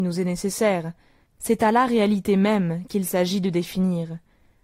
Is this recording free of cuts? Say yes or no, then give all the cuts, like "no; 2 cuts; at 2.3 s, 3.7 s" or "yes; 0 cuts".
yes; 0 cuts